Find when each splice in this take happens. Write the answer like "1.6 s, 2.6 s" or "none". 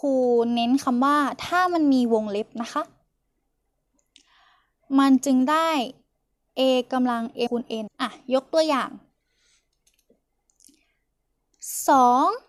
7.5 s, 7.9 s